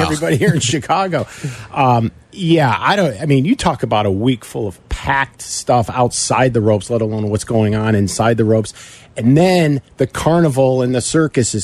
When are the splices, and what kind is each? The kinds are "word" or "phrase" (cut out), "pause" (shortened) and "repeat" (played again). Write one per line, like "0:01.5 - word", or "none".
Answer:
none